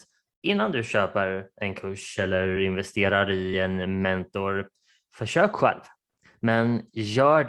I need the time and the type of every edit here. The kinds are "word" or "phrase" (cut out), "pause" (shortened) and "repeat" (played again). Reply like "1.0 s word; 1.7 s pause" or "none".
none